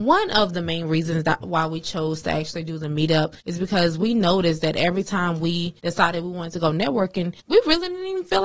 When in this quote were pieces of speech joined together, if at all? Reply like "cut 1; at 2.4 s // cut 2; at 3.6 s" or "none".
cut 1; at 3.4 s // cut 2; at 5.8 s // cut 3; at 7.4 s